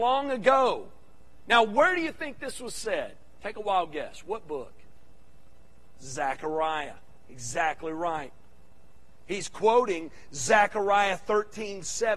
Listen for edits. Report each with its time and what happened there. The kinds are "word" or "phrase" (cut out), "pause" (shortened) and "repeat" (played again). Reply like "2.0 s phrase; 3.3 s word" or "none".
none